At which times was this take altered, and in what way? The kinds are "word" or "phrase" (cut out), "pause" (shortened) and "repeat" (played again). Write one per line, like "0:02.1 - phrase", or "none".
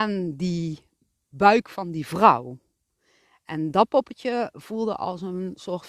none